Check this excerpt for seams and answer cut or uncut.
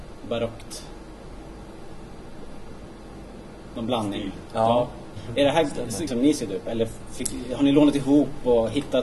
cut